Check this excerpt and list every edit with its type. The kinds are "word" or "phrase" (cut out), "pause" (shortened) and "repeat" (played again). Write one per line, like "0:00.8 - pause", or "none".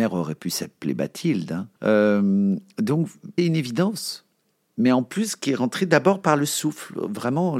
0:01.8 - pause
0:03.4 - word